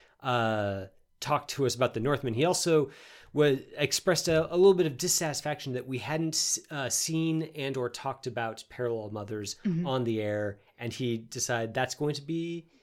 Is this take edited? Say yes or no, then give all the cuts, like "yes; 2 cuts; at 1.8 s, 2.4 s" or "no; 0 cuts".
no; 0 cuts